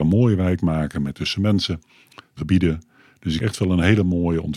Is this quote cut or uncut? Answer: cut